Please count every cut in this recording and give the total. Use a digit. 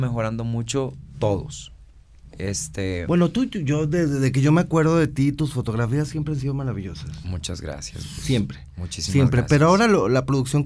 0